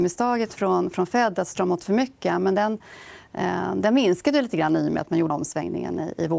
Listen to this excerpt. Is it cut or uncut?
cut